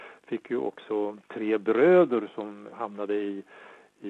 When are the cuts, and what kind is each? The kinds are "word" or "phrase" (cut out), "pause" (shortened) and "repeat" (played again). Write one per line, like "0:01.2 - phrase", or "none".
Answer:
0:02.7 - word